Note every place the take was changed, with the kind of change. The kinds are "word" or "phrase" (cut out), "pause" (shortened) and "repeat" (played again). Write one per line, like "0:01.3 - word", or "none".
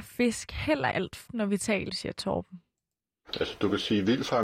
0:00.9 - word
0:01.3 - word
0:01.9 - phrase